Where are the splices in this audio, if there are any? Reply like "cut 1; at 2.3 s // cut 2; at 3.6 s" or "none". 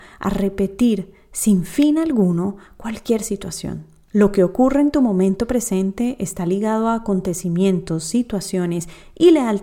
none